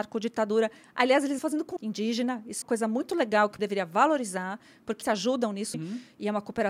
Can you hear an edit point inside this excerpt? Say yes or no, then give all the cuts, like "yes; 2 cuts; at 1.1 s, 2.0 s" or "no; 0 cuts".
yes; 6 cuts; at 1.4 s, 1.8 s, 2.6 s, 3.6 s, 5.0 s, 5.7 s